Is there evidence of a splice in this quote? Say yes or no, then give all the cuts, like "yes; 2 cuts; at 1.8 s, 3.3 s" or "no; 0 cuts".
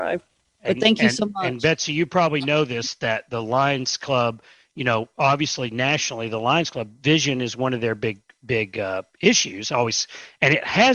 no; 0 cuts